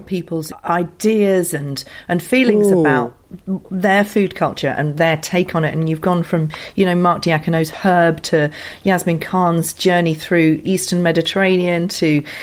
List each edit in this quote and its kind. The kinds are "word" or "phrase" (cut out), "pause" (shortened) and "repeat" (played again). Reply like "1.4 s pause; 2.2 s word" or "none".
10.6 s word